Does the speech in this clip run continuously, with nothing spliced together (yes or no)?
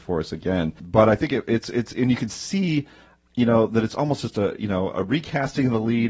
yes